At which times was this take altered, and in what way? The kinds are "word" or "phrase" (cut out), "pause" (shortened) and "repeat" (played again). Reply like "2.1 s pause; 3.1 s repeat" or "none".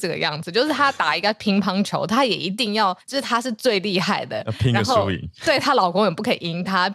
3.0 s pause